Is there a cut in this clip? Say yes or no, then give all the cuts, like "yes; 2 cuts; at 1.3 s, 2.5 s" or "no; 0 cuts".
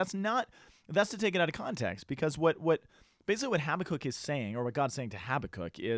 no; 0 cuts